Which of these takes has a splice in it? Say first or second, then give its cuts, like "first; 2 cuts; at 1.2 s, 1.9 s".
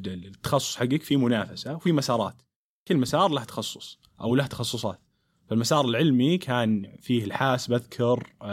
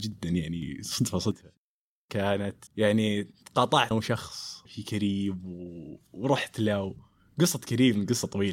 second; 3 cuts; at 2.7 s, 3.9 s, 4.7 s